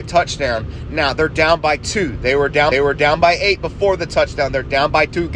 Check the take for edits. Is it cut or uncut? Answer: cut